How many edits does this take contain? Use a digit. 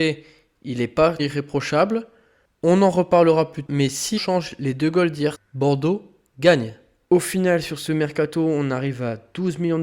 4